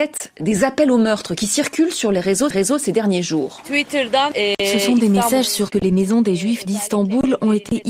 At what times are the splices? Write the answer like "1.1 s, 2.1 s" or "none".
2.5 s, 5.7 s